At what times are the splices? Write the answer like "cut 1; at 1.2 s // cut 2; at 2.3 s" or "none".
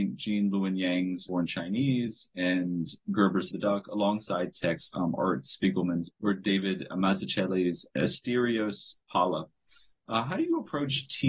cut 1; at 1.3 s // cut 2; at 3.5 s // cut 3; at 4.9 s // cut 4; at 6.1 s // cut 5; at 7.9 s